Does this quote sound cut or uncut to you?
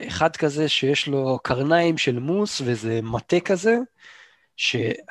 uncut